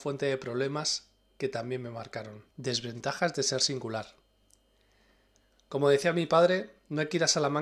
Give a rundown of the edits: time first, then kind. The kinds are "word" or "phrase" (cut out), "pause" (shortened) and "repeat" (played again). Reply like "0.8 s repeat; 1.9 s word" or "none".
2.5 s pause